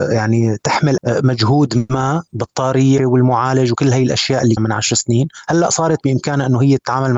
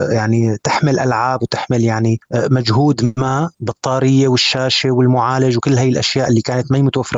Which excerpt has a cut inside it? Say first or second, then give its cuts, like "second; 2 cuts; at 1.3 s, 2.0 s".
first; 3 cuts; at 1.0 s, 3.0 s, 4.6 s